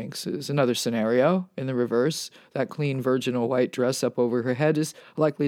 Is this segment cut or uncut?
uncut